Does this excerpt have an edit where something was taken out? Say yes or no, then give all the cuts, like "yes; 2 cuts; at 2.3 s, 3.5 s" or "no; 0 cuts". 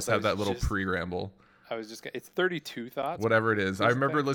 no; 0 cuts